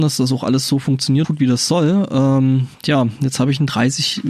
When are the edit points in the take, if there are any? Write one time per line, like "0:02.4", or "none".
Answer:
0:01.2